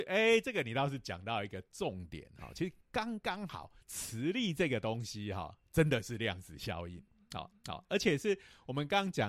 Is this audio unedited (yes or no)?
no